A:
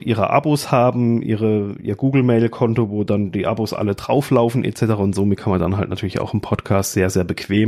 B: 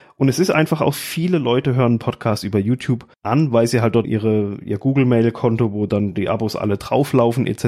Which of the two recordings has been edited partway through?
B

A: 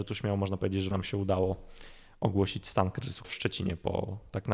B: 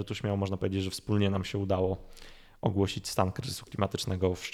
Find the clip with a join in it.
A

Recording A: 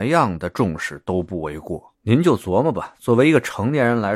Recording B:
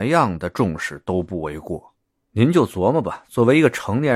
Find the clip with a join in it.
A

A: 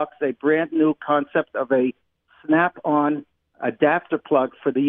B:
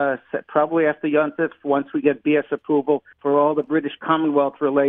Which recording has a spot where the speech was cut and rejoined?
B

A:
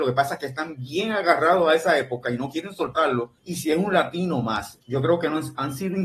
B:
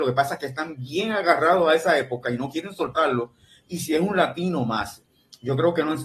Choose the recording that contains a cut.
A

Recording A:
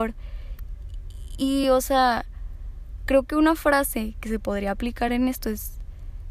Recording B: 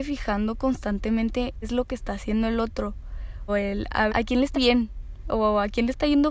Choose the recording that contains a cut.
B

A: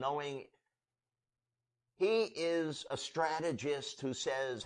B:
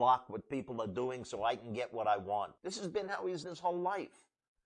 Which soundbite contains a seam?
B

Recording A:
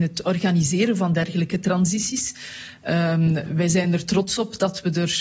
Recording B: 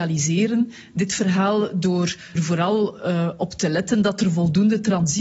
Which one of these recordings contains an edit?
B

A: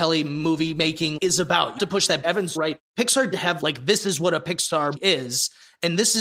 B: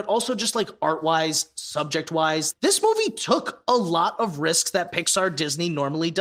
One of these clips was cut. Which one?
A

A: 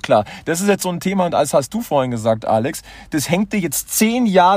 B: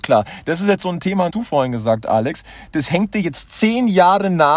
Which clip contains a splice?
B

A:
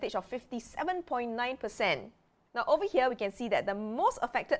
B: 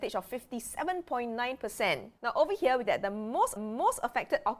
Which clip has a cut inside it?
B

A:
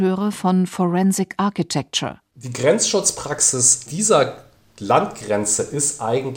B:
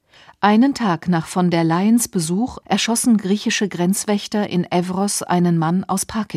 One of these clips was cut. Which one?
A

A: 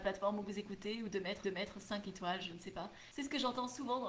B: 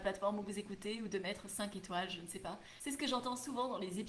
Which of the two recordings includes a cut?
A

